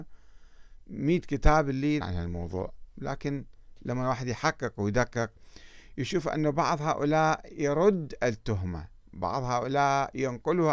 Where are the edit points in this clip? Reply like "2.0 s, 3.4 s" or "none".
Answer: 2.0 s